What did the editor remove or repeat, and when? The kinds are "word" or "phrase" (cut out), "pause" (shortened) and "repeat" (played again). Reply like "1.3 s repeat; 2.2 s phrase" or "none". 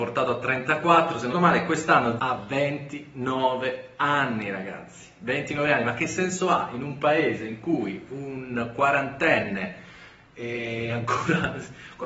1.3 s word; 2.2 s phrase